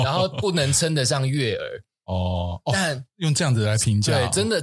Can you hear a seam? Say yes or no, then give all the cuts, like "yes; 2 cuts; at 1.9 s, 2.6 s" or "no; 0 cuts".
no; 0 cuts